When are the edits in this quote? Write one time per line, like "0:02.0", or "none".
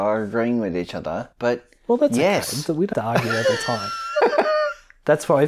0:01.3
0:02.9